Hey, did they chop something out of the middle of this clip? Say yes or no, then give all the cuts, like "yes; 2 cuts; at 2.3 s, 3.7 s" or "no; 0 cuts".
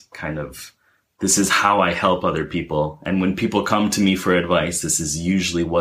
no; 0 cuts